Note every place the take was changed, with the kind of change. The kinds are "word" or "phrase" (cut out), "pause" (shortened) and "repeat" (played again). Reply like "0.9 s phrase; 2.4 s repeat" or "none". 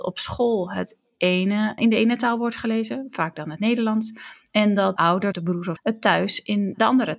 1.8 s word; 5.0 s word; 5.3 s word; 5.8 s word

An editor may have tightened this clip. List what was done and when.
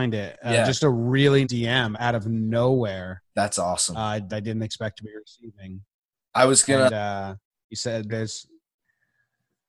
1.4 s word; 1.9 s word; 4.3 s word; 8.1 s word

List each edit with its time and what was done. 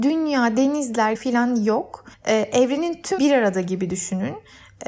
1.1 s word; 2.1 s pause; 3.2 s word

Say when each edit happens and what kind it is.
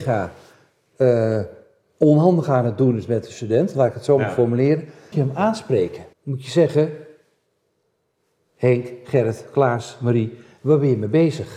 5.1 s phrase; 6.1 s pause

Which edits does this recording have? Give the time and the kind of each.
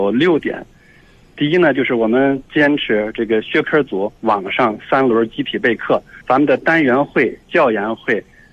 4.2 s pause; 6.2 s pause

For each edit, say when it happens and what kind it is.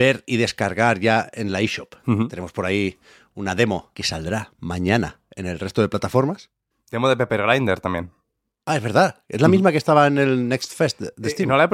3.9 s phrase

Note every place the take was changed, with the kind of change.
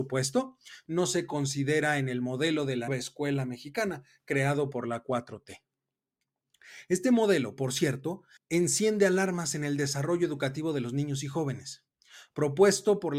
2.9 s word; 8.4 s pause

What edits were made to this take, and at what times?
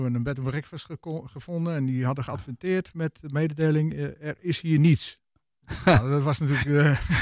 none

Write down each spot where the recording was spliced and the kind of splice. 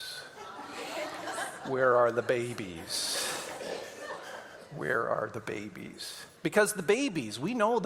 6.4 s pause

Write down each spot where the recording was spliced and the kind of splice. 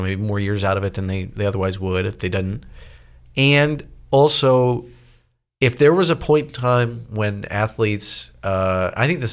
none

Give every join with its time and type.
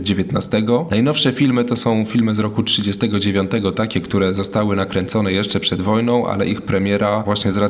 none

